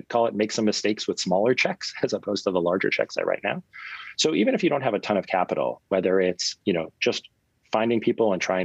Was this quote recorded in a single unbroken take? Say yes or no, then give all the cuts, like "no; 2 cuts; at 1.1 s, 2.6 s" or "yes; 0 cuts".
yes; 0 cuts